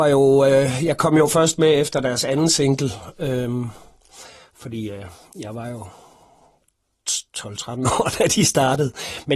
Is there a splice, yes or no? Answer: no